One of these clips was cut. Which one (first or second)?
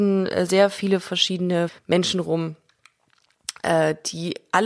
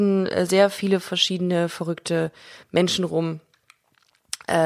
first